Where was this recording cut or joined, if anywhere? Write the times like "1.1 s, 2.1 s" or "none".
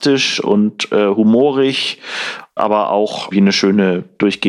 2.6 s, 3.3 s